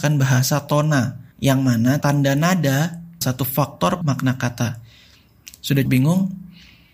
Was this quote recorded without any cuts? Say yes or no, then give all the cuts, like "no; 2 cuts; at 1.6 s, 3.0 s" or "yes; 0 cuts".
no; 5 cuts; at 1.3 s, 2.0 s, 3.2 s, 4.0 s, 5.9 s